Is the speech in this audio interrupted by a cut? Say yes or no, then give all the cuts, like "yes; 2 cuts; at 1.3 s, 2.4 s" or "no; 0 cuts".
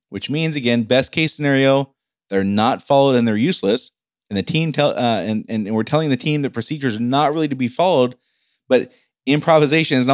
no; 0 cuts